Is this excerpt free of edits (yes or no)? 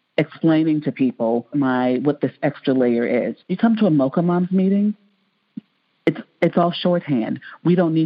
no